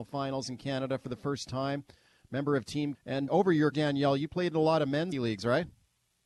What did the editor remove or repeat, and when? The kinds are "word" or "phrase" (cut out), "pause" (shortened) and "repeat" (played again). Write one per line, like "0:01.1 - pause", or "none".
0:02.9 - word
0:03.3 - word
0:03.7 - word
0:05.1 - word